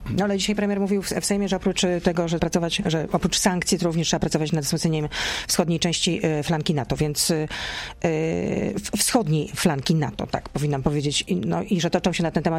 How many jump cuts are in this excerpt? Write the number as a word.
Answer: two